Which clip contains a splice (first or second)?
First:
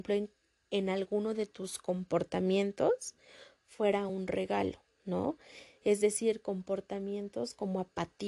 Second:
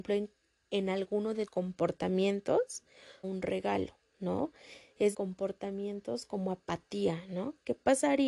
second